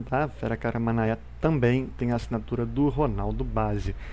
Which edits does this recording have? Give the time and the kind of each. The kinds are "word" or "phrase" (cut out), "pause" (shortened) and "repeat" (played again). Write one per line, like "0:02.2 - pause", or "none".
none